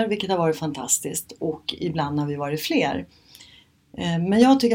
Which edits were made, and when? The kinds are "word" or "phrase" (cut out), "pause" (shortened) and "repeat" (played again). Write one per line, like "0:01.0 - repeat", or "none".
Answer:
none